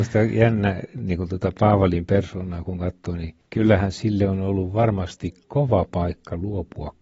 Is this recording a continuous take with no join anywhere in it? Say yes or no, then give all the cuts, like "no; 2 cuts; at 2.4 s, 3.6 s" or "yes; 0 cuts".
no; 1 cut; at 3.4 s